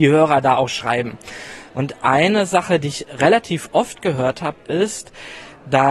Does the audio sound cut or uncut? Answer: uncut